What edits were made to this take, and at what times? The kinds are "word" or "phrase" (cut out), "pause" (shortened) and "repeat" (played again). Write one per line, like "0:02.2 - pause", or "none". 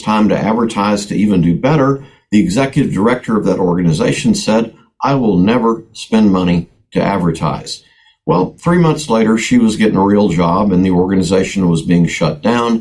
none